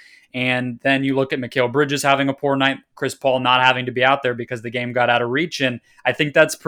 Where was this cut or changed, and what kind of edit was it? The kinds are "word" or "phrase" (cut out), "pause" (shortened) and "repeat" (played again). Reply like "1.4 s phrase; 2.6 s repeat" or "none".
none